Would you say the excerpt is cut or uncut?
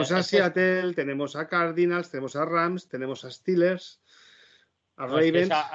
uncut